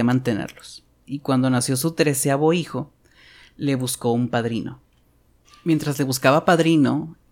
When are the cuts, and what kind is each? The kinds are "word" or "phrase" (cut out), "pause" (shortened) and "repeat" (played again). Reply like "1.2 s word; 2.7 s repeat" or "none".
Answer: none